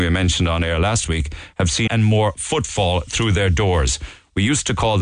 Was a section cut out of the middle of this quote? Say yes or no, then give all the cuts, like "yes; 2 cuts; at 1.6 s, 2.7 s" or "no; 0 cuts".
yes; 1 cut; at 1.9 s